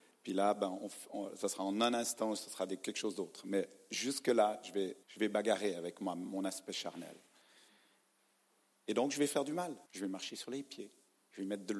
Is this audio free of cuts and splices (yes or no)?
no